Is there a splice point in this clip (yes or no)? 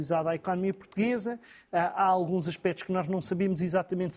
no